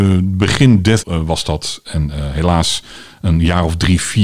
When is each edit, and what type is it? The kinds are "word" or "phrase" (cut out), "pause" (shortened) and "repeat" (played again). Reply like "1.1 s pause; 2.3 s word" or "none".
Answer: 1.0 s word